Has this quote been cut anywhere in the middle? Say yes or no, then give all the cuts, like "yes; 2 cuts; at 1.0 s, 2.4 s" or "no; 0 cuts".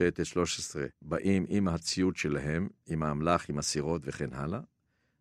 yes; 1 cut; at 0.9 s